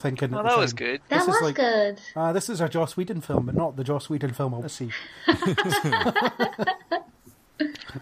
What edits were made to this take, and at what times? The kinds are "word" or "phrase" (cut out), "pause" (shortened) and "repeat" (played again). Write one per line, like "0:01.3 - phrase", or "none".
0:01.0 - pause
0:04.6 - word